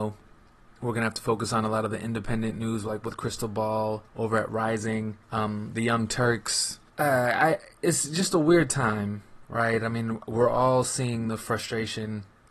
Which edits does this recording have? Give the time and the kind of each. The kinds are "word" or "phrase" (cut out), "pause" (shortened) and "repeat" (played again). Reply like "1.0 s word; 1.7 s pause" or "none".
4.1 s pause; 5.2 s pause; 6.9 s pause